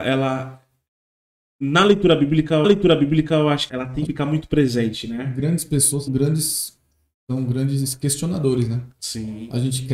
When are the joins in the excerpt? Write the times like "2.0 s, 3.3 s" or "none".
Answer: 2.6 s, 3.7 s, 4.1 s, 6.1 s